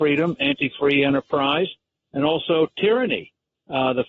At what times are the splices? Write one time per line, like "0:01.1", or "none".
none